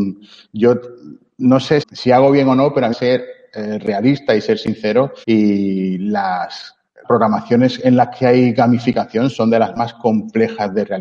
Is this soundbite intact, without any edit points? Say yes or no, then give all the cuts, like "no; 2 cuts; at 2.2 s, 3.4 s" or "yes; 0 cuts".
no; 4 cuts; at 1.8 s, 2.9 s, 5.2 s, 7.0 s